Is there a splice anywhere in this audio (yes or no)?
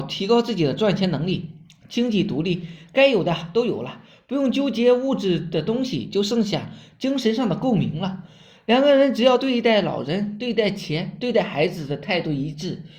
no